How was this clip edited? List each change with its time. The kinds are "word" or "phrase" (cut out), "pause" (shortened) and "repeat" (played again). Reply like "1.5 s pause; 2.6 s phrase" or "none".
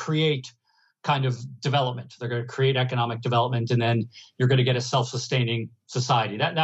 none